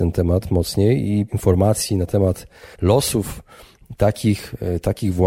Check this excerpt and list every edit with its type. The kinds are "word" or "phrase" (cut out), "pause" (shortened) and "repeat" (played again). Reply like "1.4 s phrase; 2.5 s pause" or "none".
1.3 s word; 2.7 s pause